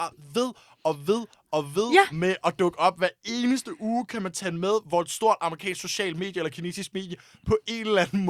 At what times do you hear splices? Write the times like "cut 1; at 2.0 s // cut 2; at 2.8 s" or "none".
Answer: none